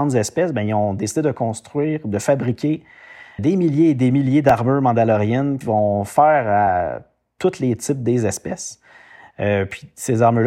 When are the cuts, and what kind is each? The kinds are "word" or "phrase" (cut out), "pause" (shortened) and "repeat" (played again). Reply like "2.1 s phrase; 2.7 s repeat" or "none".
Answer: 3.4 s word; 5.6 s word